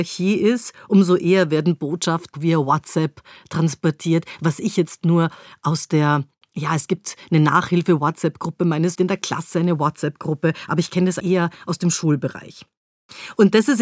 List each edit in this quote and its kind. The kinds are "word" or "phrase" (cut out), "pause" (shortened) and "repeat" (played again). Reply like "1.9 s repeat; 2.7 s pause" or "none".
2.3 s word; 8.9 s phrase; 11.2 s word